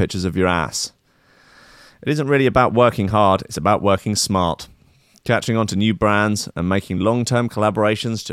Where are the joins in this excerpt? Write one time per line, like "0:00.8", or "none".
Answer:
none